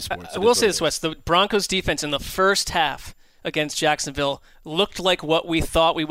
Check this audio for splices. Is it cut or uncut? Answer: uncut